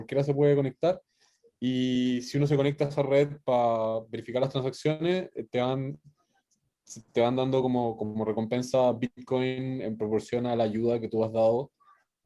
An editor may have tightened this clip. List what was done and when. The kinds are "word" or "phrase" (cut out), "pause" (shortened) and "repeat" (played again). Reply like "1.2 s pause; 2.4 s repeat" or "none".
none